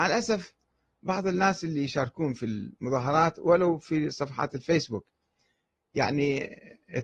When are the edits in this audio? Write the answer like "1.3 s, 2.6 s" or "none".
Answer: none